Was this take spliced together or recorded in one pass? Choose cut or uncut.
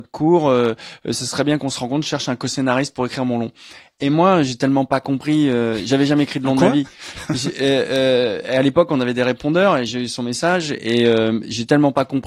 uncut